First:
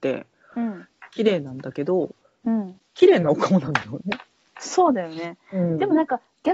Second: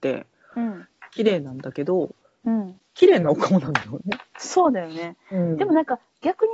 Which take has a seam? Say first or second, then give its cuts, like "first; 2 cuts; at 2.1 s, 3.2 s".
second; 1 cut; at 4.3 s